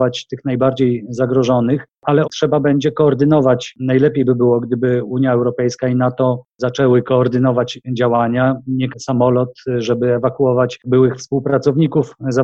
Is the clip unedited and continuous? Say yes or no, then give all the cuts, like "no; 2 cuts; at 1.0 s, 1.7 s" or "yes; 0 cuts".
no; 2 cuts; at 2.2 s, 8.9 s